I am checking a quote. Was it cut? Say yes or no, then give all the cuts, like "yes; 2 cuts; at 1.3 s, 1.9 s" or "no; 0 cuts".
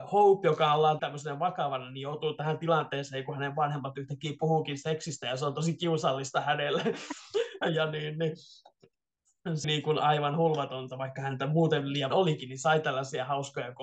yes; 3 cuts; at 1.0 s, 9.6 s, 12.1 s